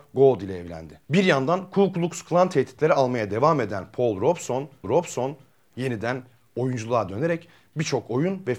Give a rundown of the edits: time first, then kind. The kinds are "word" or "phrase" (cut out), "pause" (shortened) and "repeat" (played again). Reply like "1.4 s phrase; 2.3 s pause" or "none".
1.0 s pause; 4.8 s repeat